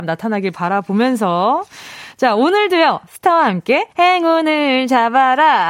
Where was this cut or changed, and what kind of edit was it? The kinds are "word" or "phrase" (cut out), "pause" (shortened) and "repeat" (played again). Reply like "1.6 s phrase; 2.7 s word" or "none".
3.9 s pause